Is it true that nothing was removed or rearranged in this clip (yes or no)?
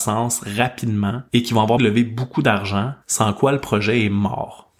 no